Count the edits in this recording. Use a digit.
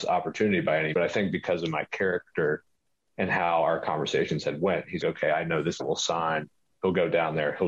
3